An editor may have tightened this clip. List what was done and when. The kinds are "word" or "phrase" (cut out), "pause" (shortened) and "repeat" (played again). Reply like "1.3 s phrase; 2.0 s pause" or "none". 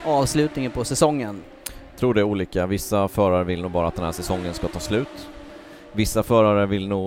none